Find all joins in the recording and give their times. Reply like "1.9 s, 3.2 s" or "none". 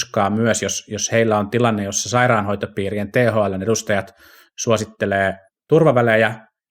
5.5 s

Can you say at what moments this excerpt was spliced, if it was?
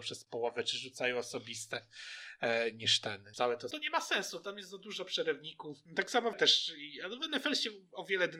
3.3 s, 3.7 s, 5.9 s, 6.3 s

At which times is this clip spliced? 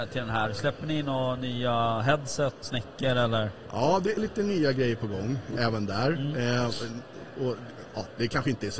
2.6 s, 4.2 s, 5.6 s

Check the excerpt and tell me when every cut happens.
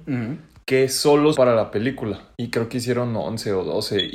1.3 s

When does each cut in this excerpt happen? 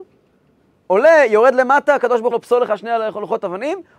2.3 s

